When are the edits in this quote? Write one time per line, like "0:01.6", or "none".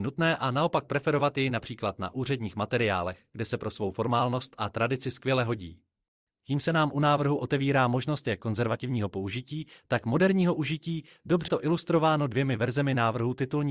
0:11.5